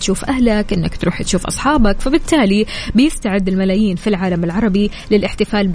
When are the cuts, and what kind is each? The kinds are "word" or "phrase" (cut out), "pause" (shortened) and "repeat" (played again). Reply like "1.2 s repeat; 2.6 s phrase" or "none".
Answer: none